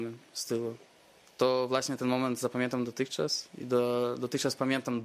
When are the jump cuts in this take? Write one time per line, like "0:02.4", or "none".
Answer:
none